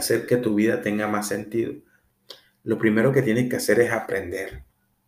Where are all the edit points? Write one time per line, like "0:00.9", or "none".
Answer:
none